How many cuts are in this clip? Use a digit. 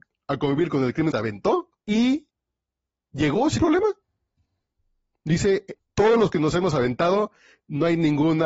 4